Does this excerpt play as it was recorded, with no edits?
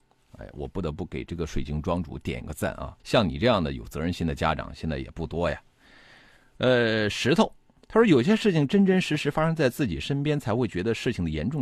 no; 1 cut; at 3.0 s

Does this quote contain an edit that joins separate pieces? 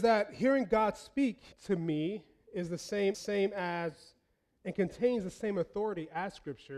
yes; 2 cuts; at 1.5 s, 3.1 s

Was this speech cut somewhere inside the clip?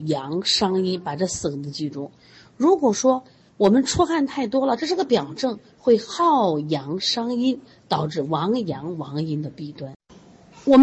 no; 0 cuts

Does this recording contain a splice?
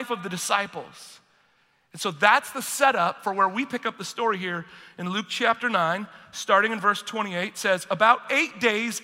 no; 0 cuts

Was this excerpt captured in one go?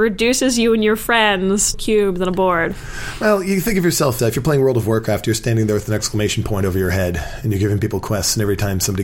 no; 2 cuts; at 1.7 s, 4.2 s

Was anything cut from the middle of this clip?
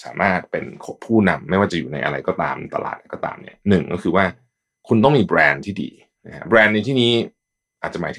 no; 0 cuts

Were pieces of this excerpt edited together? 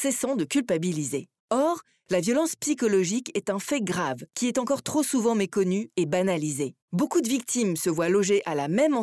yes; 3 cuts; at 1.4 s, 4.3 s, 6.8 s

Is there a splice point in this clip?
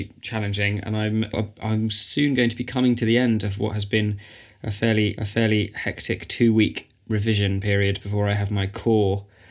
yes; 2 cuts; at 1.3 s, 5.2 s

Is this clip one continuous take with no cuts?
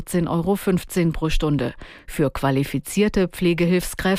yes; 0 cuts

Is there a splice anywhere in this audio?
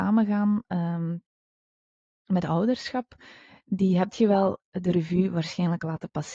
no; 0 cuts

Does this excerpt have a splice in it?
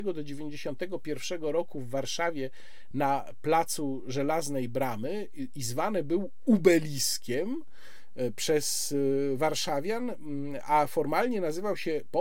no; 0 cuts

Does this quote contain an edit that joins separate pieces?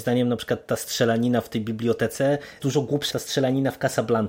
yes; 2 cuts; at 2.6 s, 3.1 s

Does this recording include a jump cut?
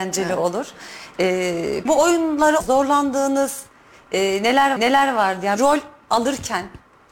yes; 4 cuts; at 1.9 s, 2.6 s, 4.8 s, 5.6 s

